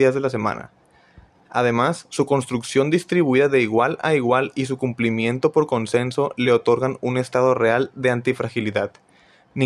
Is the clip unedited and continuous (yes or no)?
yes